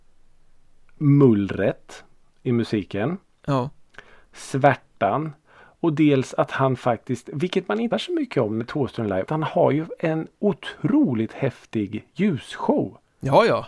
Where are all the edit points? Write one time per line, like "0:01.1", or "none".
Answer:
0:07.9
0:08.6
0:09.3